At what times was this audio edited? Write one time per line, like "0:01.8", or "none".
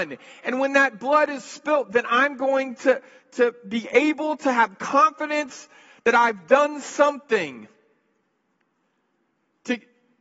none